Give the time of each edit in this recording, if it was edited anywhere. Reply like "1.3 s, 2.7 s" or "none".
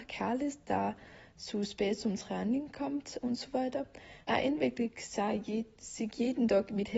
4.2 s